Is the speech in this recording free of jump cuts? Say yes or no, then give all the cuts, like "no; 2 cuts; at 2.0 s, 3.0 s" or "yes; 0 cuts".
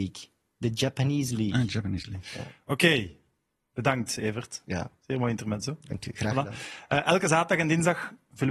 yes; 0 cuts